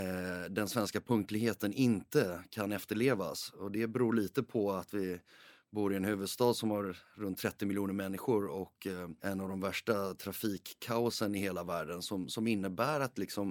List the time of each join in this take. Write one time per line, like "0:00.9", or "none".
0:09.2